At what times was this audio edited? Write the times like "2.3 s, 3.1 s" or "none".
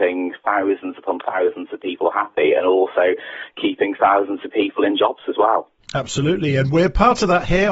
none